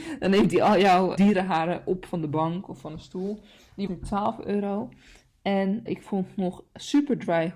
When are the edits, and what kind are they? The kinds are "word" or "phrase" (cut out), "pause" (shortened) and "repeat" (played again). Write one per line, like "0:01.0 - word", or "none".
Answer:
0:01.2 - word
0:03.9 - word
0:05.9 - word